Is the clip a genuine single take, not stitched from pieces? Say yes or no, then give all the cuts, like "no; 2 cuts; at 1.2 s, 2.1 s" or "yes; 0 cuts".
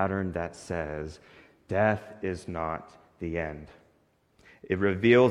yes; 0 cuts